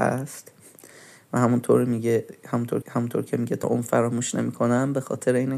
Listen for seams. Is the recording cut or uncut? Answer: cut